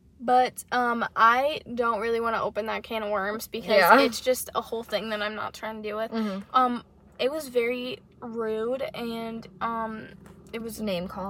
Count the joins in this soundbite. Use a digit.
0